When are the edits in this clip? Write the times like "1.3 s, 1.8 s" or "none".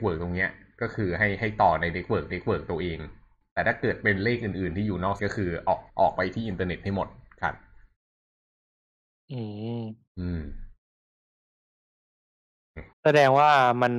2.3 s, 3.4 s, 5.2 s, 5.9 s, 12.9 s